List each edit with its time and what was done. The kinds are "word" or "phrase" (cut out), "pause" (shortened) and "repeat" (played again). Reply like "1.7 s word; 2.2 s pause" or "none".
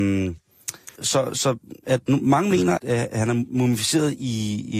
1.0 s word; 2.8 s word